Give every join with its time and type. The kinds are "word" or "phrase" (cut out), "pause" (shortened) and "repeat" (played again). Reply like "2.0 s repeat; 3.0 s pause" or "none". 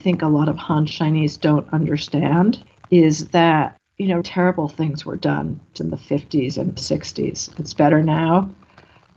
4.2 s word; 5.8 s word; 6.8 s word